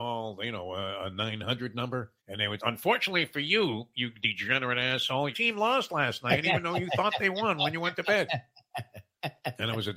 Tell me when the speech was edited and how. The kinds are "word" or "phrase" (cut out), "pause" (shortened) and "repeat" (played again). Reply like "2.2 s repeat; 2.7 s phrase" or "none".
2.2 s pause; 2.6 s word; 5.3 s word